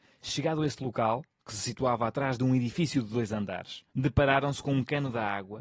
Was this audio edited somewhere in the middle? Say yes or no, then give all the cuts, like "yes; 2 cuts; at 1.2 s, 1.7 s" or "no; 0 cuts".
yes; 1 cut; at 3.9 s